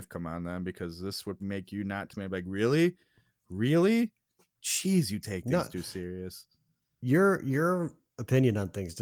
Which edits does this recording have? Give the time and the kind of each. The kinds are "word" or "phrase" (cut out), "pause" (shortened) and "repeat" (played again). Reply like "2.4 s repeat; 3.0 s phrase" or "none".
1.4 s word; 2.1 s word